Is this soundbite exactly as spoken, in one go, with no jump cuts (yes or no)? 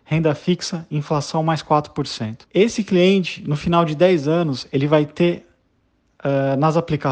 no